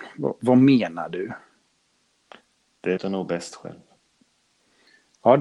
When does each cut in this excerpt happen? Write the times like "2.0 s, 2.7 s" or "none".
3.0 s